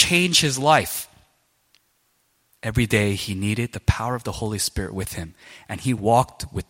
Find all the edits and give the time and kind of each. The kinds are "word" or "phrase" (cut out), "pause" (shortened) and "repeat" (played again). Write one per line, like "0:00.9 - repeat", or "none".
none

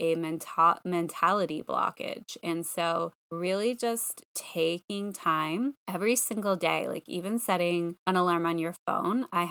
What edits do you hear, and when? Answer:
0:03.2 - pause
0:05.8 - pause
0:08.0 - pause

